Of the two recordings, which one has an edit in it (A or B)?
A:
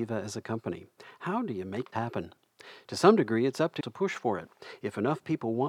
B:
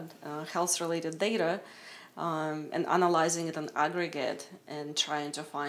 A